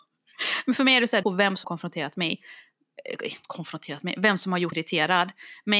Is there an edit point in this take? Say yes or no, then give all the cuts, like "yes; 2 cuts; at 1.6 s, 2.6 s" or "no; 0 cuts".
yes; 3 cuts; at 1.2 s, 1.6 s, 4.7 s